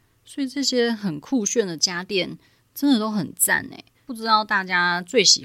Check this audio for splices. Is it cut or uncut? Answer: uncut